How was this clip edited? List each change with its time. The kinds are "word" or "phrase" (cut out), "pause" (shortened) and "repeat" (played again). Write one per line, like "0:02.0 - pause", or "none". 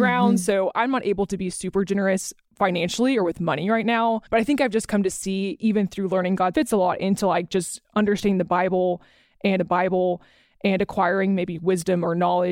0:04.3 - pause
0:06.5 - phrase
0:09.6 - repeat

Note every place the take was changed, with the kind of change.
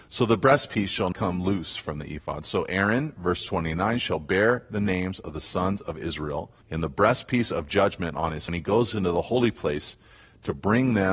0:01.1 - word
0:06.6 - pause
0:08.5 - phrase

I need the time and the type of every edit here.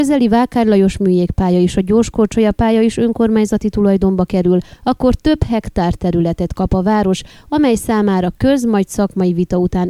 none

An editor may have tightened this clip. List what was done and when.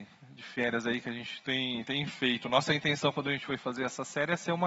none

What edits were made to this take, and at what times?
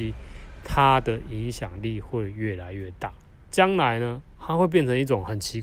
0:03.3 - pause
0:04.3 - pause

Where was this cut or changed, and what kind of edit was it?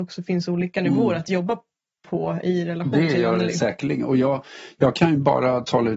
none

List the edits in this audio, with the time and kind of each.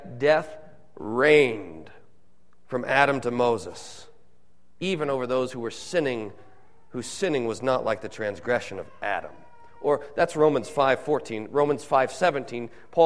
none

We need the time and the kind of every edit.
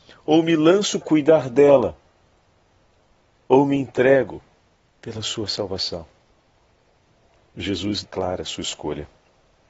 0:01.0 - word
0:08.0 - word

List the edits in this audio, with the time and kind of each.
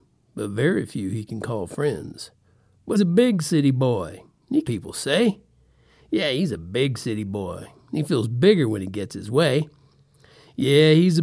0:03.0 - word
0:04.6 - phrase

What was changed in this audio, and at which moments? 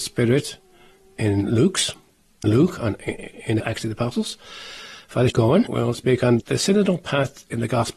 0:02.4 - word
0:03.6 - word
0:05.3 - word
0:05.7 - word
0:06.4 - word

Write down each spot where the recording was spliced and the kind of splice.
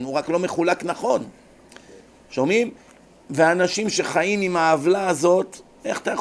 none

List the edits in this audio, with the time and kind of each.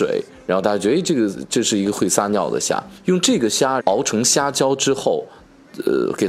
0:03.8 - phrase

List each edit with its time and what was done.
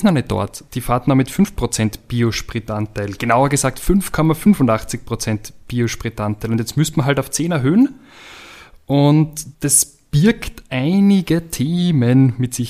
0:09.5 - pause

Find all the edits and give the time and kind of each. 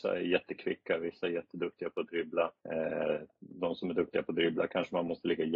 0:02.6 - pause

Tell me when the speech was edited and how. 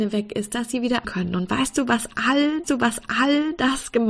0:01.0 - phrase
0:02.6 - repeat

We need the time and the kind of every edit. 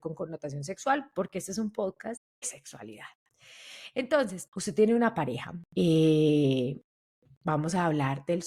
0:02.4 - word
0:04.5 - word
0:05.7 - pause

